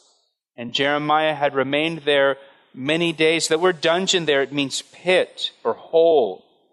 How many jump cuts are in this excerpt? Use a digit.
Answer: 0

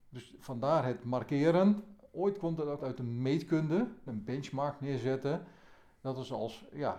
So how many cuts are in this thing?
2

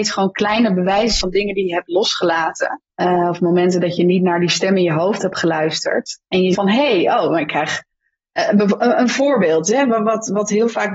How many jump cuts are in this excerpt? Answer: 4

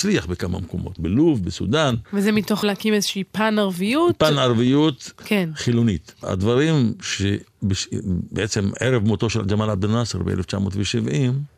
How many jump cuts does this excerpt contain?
3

